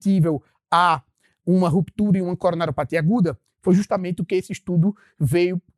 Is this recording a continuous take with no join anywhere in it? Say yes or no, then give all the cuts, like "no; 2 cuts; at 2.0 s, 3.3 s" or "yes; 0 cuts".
yes; 0 cuts